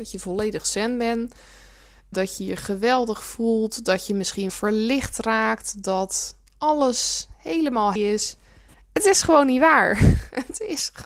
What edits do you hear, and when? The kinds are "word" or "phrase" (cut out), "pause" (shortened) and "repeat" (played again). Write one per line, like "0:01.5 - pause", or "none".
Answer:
0:02.1 - word
0:04.5 - word
0:08.0 - word